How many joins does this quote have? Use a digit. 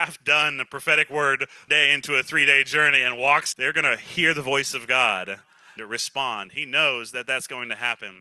3